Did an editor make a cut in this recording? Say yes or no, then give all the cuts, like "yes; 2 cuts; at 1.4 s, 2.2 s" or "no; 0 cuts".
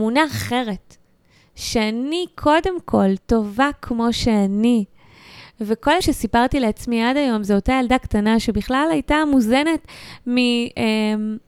yes; 1 cut; at 6.0 s